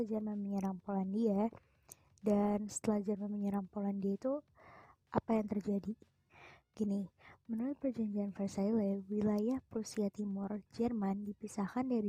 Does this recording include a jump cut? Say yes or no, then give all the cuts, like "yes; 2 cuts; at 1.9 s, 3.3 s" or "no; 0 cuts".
no; 0 cuts